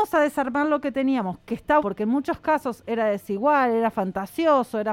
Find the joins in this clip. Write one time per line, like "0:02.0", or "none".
0:01.8